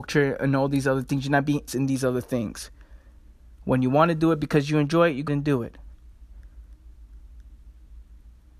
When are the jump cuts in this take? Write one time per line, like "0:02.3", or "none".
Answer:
0:01.7
0:05.3